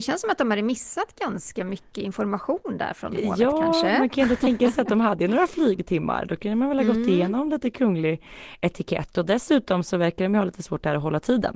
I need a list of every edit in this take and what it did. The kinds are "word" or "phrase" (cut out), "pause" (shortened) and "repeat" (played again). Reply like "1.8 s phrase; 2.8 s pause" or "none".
none